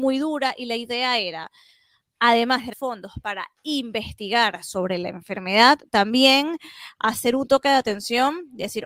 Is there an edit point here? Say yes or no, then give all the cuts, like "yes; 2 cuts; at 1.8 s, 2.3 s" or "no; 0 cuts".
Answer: yes; 1 cut; at 2.7 s